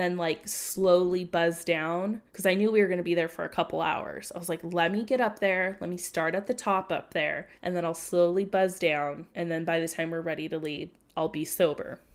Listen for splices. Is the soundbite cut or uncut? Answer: cut